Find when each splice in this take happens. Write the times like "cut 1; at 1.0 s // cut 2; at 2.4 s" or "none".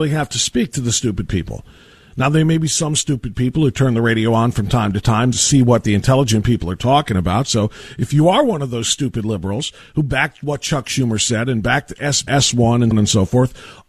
cut 1; at 5.3 s // cut 2; at 12.3 s // cut 3; at 12.9 s